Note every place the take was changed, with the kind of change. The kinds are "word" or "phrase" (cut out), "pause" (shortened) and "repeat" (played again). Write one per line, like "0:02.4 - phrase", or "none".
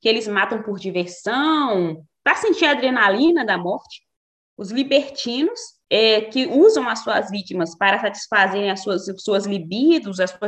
none